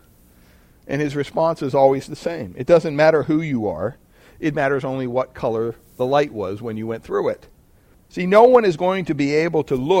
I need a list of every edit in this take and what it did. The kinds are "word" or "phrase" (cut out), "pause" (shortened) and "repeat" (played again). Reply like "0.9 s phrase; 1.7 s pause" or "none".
none

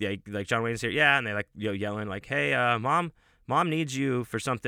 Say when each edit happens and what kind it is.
none

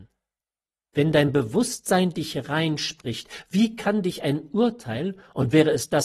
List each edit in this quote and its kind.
none

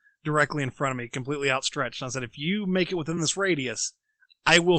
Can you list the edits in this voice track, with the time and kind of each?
none

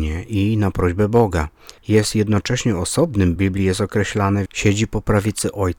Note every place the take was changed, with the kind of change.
1.8 s pause; 3.4 s phrase; 4.5 s word

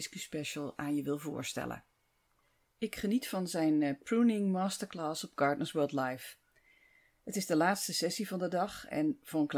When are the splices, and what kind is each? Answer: none

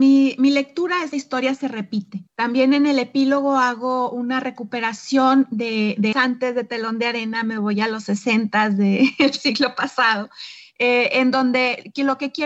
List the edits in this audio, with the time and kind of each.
1.1 s phrase; 2.3 s pause; 6.1 s word

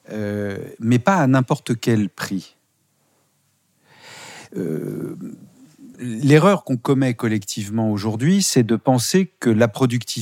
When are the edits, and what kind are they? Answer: 5.9 s pause

